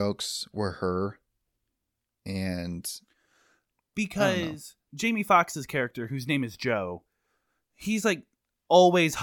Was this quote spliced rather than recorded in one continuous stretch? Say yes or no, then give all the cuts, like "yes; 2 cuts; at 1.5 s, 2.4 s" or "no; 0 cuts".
no; 0 cuts